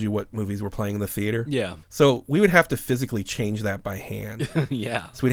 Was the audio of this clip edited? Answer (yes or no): yes